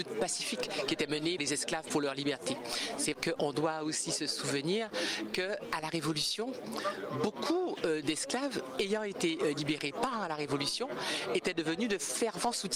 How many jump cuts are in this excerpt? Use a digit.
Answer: 2